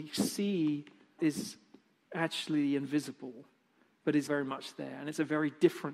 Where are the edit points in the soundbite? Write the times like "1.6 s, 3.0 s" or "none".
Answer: 1.2 s, 4.3 s

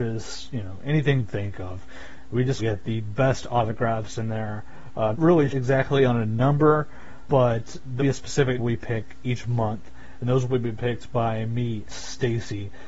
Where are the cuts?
1.2 s, 2.6 s, 5.1 s, 5.5 s, 7.3 s, 8.0 s, 8.6 s, 11.9 s

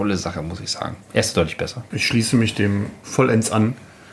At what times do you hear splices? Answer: 1.0 s

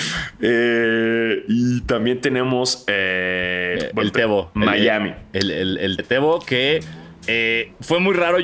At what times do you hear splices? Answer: 3.8 s, 6.0 s

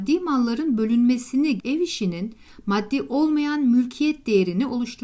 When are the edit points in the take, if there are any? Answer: 1.6 s

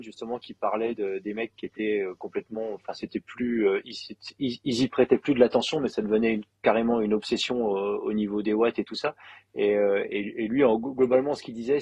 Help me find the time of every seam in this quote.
none

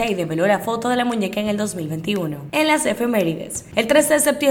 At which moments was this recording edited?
none

